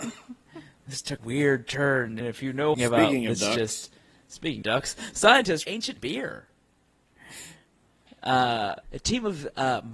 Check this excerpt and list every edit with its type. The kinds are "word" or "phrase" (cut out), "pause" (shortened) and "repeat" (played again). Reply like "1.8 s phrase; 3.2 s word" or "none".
1.2 s word; 2.2 s word; 2.7 s phrase; 4.6 s word; 5.6 s word; 6.0 s word; 8.8 s pause